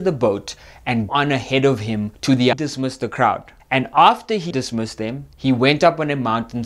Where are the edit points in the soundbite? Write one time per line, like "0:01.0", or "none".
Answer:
0:01.1
0:02.1
0:02.5
0:03.6
0:04.5
0:05.3